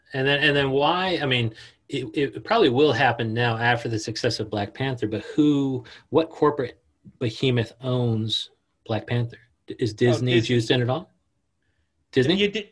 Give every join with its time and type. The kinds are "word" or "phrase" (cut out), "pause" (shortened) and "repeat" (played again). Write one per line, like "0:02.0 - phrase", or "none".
none